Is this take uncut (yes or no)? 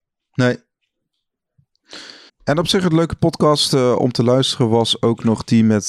no